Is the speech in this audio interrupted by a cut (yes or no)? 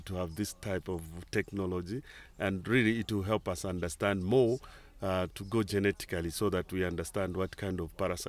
no